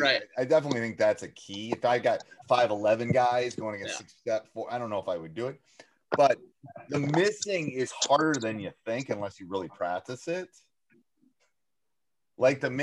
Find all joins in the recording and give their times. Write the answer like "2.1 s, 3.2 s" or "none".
none